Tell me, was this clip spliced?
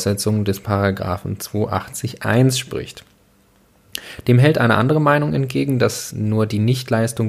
no; 0 cuts

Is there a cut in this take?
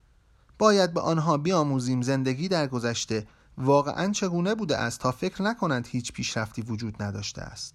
no; 0 cuts

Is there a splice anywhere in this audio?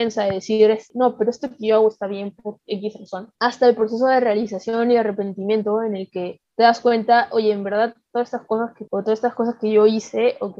yes; 2 cuts; at 3.4 s, 8.9 s

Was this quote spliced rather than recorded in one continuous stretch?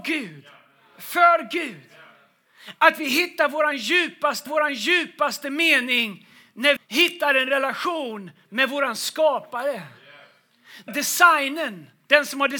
yes; 3 cuts; at 4.5 s, 6.8 s, 10.9 s

